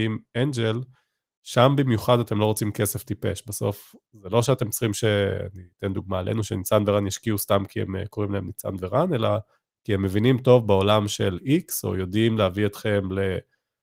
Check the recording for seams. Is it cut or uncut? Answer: uncut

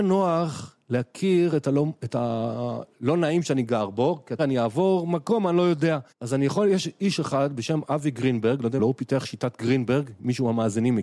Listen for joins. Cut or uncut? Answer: cut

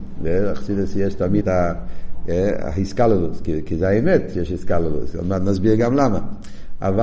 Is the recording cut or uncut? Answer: cut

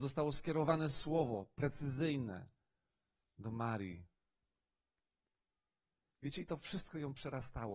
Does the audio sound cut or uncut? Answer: uncut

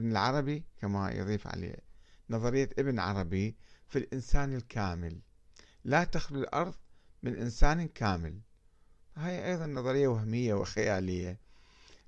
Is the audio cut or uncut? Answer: uncut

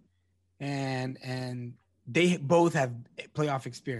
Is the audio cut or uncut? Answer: uncut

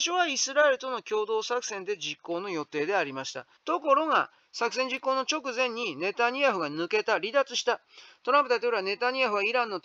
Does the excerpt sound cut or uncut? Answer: cut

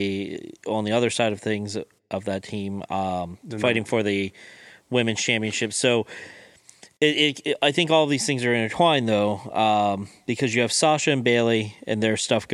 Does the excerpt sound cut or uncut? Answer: uncut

